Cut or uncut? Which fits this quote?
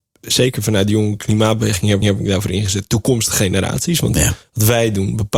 cut